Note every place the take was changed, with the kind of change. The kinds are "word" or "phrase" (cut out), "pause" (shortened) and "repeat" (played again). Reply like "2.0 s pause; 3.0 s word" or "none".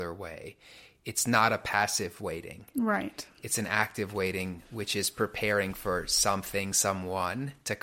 none

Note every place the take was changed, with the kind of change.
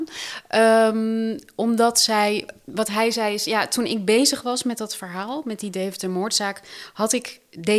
none

